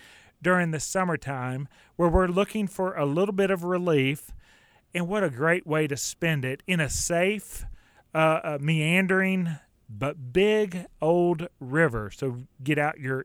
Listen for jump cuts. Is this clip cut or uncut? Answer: uncut